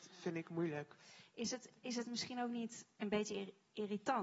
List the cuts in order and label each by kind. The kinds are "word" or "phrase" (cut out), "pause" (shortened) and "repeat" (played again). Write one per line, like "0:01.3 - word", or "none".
none